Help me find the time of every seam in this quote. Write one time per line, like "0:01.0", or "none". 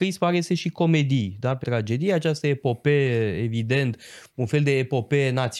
0:01.6

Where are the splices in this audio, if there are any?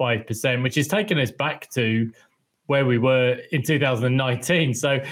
none

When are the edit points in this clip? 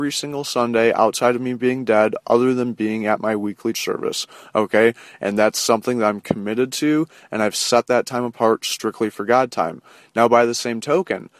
0:03.7

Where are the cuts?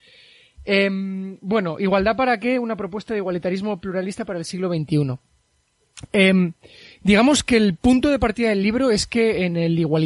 none

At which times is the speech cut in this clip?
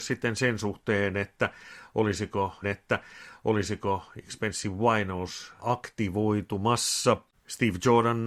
0:02.6
0:05.6
0:07.3

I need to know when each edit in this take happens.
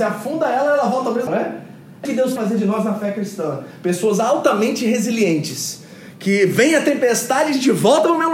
0:01.3
0:02.0
0:02.4

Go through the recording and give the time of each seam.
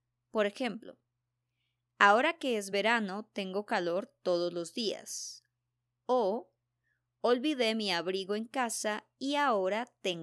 none

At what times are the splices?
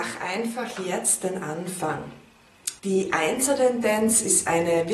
0:02.8

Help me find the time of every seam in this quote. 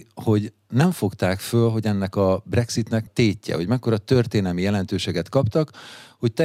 0:03.1

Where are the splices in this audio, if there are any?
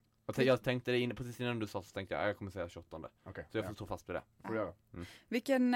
none

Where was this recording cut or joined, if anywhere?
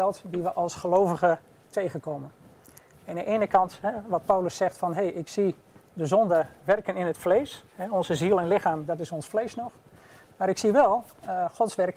none

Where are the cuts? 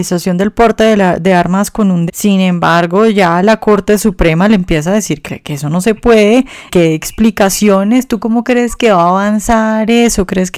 0:02.1
0:05.2
0:06.7

